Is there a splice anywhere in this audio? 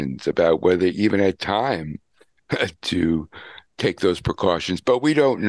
yes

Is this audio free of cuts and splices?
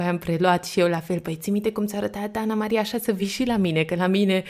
yes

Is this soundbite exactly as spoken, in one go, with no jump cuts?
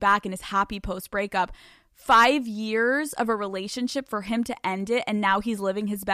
yes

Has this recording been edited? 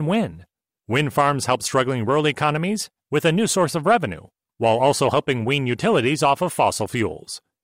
no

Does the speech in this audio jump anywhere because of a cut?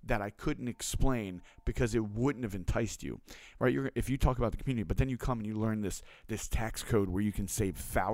no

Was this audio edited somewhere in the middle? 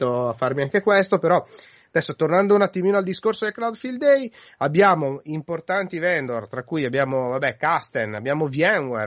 no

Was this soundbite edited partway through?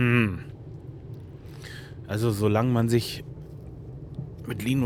no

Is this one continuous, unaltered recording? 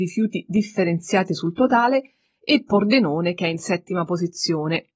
yes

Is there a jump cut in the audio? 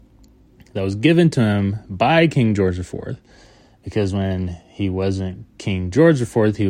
no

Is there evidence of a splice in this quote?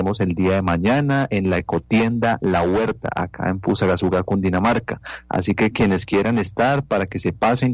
no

